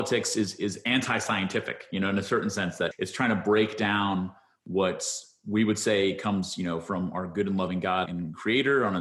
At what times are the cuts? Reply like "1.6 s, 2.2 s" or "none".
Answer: 2.9 s, 8.1 s